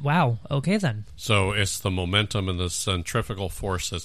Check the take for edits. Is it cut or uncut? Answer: uncut